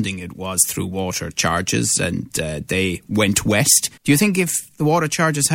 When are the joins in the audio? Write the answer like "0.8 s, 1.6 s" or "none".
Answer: 4.0 s